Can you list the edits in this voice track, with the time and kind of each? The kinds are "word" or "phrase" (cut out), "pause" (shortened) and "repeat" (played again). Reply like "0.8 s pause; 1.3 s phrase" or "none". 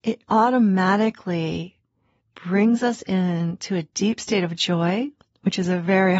none